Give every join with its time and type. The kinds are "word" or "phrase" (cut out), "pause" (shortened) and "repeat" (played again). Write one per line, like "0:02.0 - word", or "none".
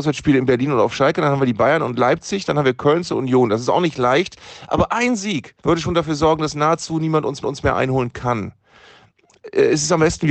0:03.1 - phrase
0:05.6 - pause
0:07.4 - repeat